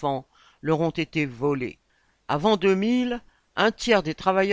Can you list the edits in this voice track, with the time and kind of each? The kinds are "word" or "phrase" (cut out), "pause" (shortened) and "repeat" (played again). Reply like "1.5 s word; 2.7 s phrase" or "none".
1.9 s pause